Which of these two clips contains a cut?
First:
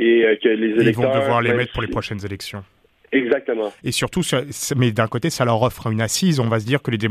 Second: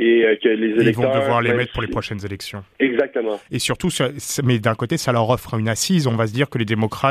second; 1 cut; at 2.7 s

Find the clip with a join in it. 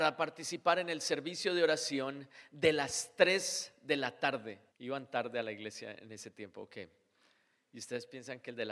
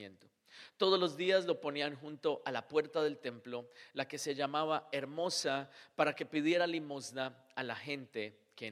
first; 1 cut; at 4.7 s

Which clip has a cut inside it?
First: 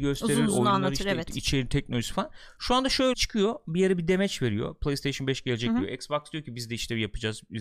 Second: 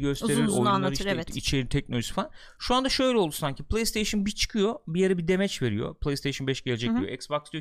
first; 1 cut; at 3.1 s

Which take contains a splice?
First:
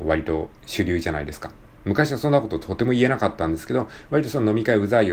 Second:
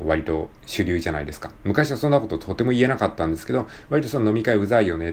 second; 1 cut; at 1.6 s

